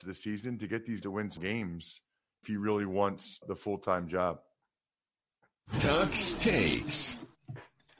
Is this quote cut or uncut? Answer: cut